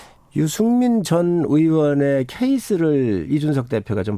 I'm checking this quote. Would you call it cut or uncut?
uncut